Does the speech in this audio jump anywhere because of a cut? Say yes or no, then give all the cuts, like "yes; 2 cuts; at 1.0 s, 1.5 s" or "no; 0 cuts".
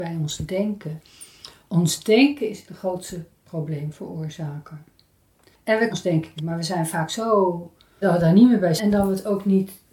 yes; 5 cuts; at 2.7 s, 5.9 s, 6.4 s, 8.0 s, 8.8 s